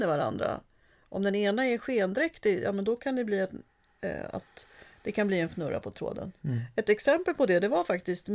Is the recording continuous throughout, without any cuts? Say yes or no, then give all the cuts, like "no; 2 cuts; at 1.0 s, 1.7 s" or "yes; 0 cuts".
yes; 0 cuts